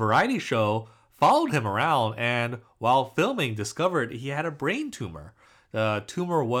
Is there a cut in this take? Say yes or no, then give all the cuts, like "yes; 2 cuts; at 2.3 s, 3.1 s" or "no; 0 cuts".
no; 0 cuts